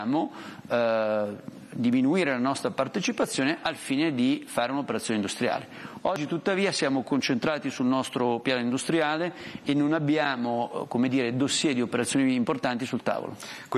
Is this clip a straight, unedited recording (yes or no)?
yes